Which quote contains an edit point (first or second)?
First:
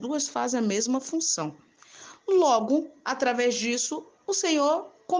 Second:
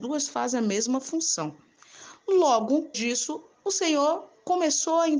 second